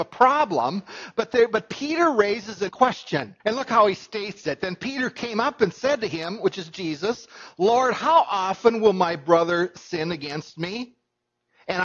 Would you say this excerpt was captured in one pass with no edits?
no; 2 cuts; at 2.7 s, 3.4 s

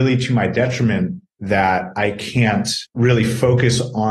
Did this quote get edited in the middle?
yes; 1 cut; at 2.9 s

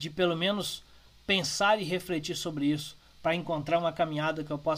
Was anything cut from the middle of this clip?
no; 0 cuts

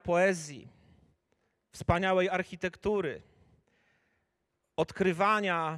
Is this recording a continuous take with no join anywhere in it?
yes; 0 cuts

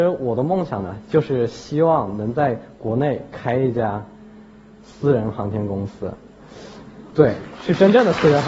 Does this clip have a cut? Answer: no; 0 cuts

